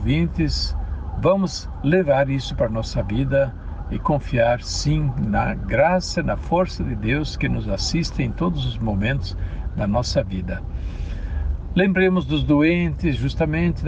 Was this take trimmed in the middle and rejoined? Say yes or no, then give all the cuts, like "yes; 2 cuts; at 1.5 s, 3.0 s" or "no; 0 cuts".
no; 0 cuts